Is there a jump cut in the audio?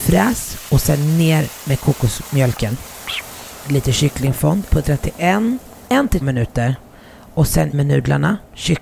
yes; 4 cuts; at 4.7 s, 5.9 s, 6.2 s, 7.7 s

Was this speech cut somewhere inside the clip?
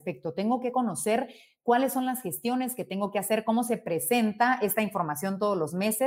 no; 0 cuts

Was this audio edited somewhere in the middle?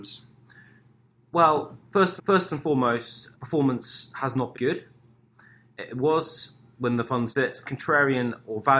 yes; 5 cuts; at 2.2 s, 3.3 s, 4.5 s, 7.3 s, 7.6 s

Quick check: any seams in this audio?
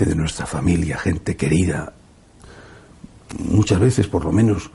yes; 1 cut; at 3.3 s

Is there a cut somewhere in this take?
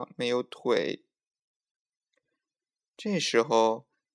no; 0 cuts

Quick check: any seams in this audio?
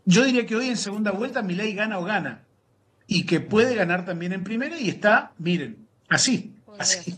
no; 0 cuts

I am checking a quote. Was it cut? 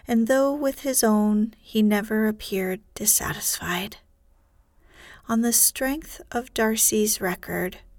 no; 0 cuts

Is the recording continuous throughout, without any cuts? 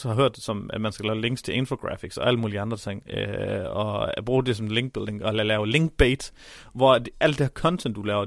yes; 0 cuts

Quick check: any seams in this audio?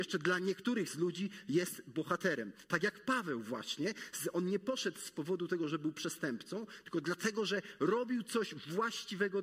no; 0 cuts

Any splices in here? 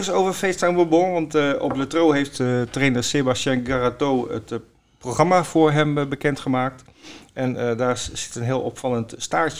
no; 0 cuts

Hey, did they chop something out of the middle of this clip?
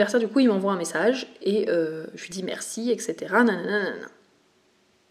no; 0 cuts

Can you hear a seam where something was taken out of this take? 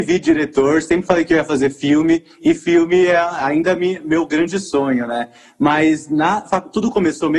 yes; 1 cut; at 6.4 s

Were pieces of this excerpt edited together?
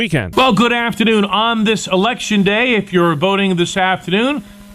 no; 0 cuts

